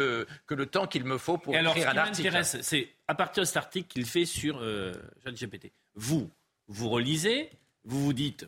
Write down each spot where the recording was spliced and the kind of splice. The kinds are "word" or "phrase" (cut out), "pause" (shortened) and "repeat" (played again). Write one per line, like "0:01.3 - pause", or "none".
none